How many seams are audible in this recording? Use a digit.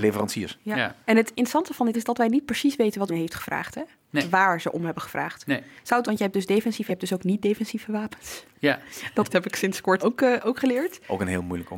7